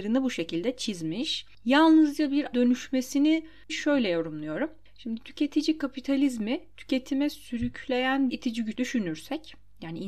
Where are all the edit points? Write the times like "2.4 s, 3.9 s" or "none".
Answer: 2.5 s, 3.7 s, 8.3 s, 8.7 s